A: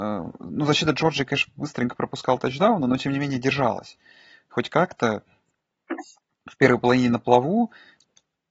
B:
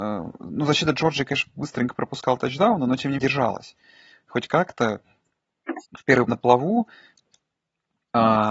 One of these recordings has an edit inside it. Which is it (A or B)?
B